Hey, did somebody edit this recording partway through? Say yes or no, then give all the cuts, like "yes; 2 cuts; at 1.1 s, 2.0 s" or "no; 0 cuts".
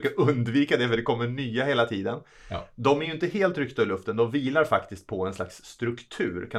no; 0 cuts